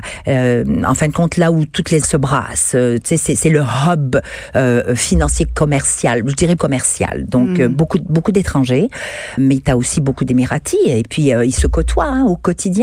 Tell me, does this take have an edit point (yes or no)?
yes